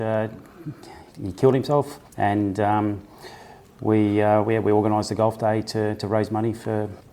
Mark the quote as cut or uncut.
cut